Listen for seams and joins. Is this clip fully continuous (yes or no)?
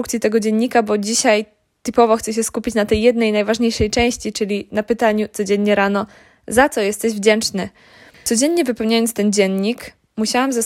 yes